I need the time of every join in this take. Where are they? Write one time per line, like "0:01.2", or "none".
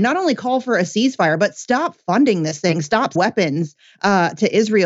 0:03.2